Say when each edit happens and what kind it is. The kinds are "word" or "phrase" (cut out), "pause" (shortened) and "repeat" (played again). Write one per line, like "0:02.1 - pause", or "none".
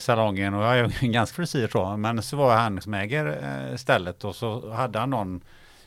0:01.3 - word
0:02.2 - word
0:02.8 - word